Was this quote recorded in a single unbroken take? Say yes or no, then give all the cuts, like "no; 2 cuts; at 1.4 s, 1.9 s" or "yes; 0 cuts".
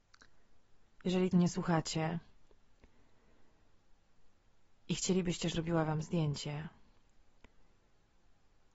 no; 2 cuts; at 1.3 s, 5.5 s